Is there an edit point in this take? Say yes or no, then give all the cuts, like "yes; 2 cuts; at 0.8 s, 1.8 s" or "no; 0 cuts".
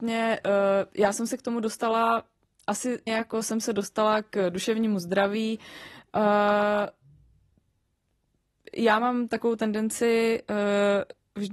yes; 1 cut; at 3.1 s